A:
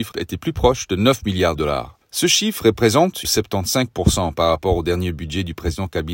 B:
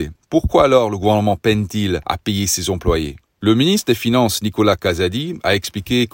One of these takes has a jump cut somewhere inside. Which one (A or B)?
A